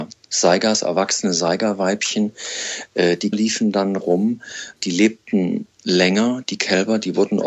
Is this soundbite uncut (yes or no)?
no